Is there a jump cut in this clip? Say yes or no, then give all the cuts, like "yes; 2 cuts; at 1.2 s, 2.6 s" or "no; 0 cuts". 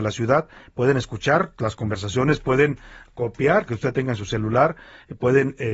yes; 1 cut; at 3.7 s